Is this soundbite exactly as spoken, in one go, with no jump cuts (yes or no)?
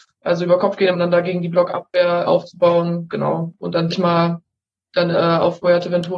no